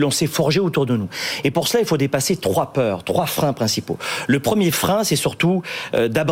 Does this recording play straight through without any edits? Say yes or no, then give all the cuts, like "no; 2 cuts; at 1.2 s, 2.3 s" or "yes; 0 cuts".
yes; 0 cuts